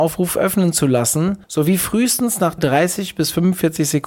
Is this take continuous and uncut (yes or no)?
no